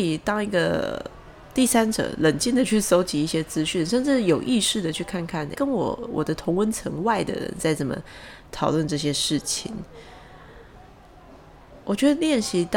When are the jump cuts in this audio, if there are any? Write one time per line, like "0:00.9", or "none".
0:05.5